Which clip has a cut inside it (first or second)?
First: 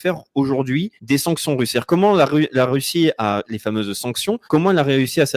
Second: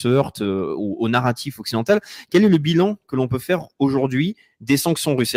first